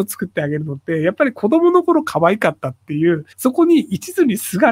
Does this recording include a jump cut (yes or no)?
yes